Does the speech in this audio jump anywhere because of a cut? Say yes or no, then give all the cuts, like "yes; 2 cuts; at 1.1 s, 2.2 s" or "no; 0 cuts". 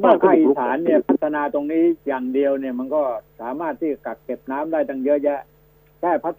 yes; 1 cut; at 2.0 s